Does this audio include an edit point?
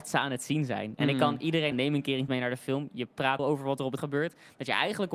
yes; 4 cuts; at 1.7 s, 2.3 s, 3.4 s, 4.0 s

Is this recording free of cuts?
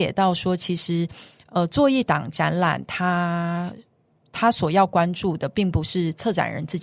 yes; 0 cuts

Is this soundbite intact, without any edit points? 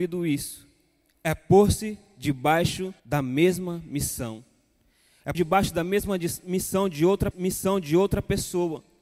no; 3 cuts; at 3.0 s, 5.3 s, 7.3 s

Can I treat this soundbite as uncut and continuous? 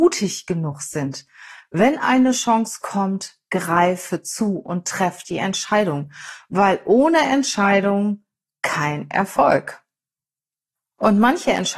yes; 0 cuts

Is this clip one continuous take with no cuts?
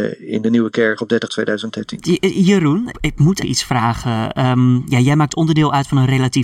no; 3 cuts; at 1.3 s, 2.9 s, 3.4 s

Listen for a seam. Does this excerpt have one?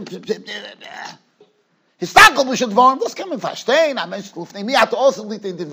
yes; 1 cut; at 2.6 s

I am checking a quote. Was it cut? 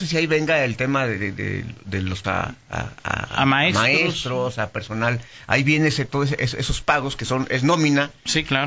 yes; 1 cut; at 2.2 s

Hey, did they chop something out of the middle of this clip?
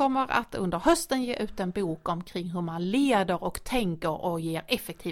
no; 0 cuts

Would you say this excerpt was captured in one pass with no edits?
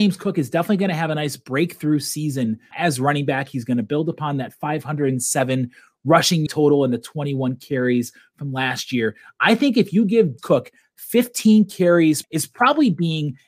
no; 4 cuts; at 2.7 s, 6.5 s, 10.4 s, 12.2 s

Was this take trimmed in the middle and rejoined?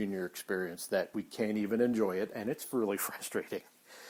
no; 0 cuts

